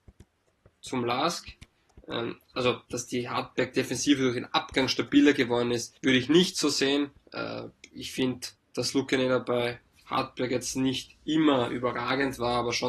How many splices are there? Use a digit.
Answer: 4